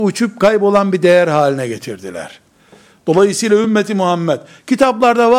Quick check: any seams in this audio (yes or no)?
no